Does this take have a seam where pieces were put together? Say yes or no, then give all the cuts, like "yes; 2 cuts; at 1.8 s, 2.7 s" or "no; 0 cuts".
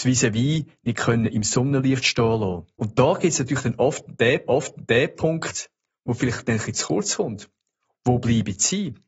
yes; 2 cuts; at 2.7 s, 4.5 s